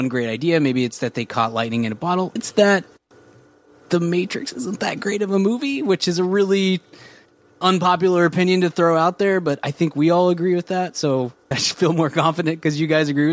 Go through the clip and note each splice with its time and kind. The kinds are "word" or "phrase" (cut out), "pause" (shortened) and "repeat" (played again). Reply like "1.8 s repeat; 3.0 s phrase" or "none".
2.4 s word; 11.5 s word